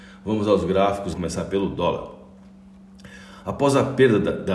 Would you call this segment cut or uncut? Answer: cut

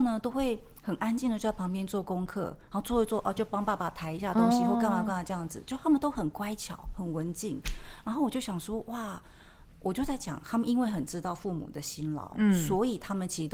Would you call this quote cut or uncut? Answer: uncut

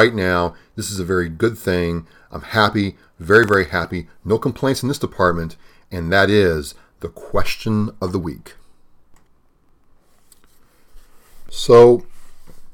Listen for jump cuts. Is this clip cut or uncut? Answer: uncut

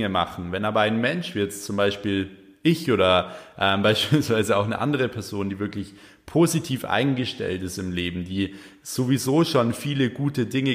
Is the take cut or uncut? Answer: uncut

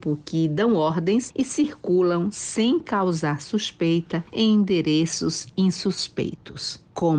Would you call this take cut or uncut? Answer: uncut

